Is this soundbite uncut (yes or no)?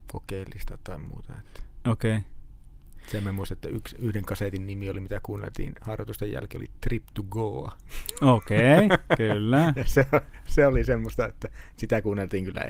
yes